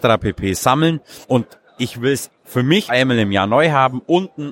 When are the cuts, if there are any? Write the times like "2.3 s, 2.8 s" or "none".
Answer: 1.2 s, 2.9 s